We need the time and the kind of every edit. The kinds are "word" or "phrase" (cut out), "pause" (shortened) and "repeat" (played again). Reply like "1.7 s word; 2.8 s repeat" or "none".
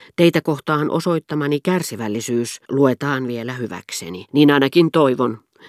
2.6 s pause; 4.3 s pause